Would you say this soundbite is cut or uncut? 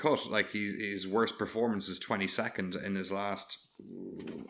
uncut